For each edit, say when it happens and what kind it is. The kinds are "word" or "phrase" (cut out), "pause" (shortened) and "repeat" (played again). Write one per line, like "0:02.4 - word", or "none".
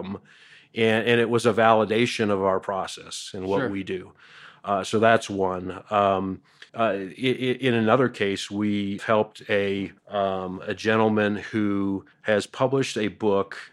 0:06.7 - pause
0:09.0 - word
0:10.0 - pause
0:12.1 - pause